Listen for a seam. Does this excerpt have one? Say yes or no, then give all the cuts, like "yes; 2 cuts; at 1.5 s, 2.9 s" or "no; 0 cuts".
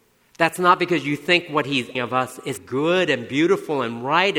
yes; 2 cuts; at 1.9 s, 2.6 s